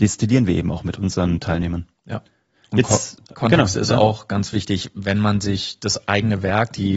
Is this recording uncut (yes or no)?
yes